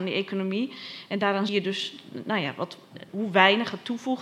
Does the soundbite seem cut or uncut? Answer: cut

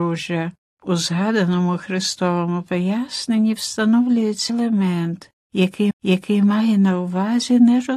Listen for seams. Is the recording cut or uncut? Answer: cut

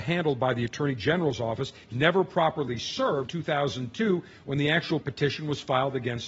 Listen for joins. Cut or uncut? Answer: cut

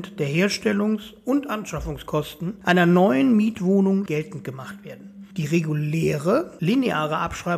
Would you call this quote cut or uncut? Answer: cut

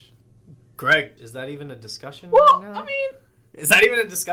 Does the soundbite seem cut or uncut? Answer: cut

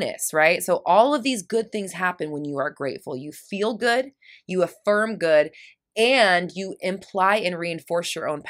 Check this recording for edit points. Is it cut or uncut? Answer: uncut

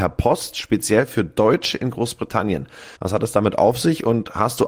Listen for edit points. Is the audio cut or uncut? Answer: cut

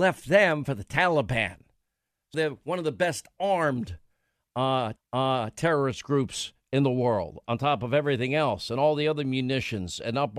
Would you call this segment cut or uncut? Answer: cut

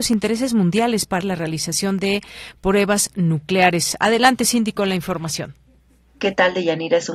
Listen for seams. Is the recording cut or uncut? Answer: cut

